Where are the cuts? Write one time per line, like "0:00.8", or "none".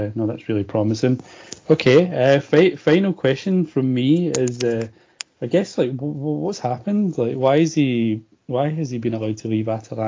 none